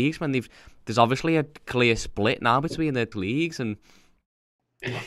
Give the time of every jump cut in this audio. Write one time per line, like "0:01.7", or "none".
0:03.1